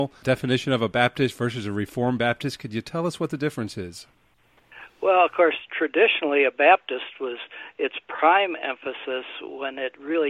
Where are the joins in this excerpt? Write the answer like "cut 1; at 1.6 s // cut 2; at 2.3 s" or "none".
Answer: none